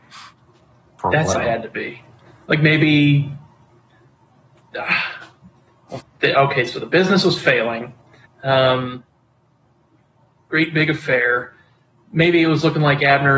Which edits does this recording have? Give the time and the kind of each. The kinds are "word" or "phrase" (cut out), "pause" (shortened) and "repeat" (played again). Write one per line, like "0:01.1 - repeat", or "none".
0:01.3 - word
0:06.0 - word
0:08.3 - pause